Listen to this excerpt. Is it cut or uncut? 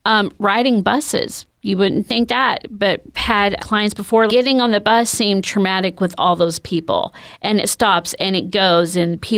cut